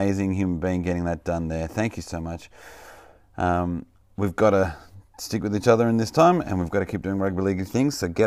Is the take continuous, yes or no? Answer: no